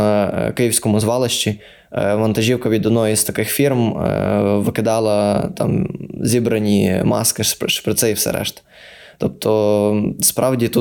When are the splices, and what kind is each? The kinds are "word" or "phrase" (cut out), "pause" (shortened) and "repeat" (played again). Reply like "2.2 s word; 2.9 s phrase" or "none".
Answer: none